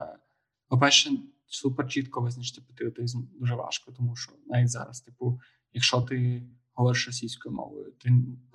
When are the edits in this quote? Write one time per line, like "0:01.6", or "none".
none